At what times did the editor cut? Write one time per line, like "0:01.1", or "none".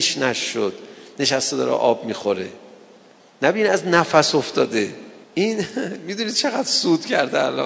0:05.2